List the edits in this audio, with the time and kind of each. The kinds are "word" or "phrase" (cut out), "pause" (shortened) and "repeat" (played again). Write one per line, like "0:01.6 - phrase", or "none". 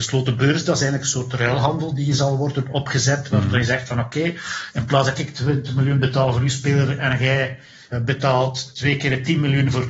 none